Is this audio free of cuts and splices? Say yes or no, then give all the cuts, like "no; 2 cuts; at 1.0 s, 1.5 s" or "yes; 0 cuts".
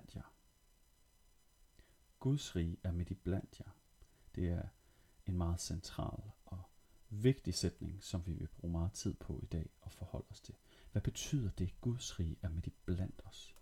yes; 0 cuts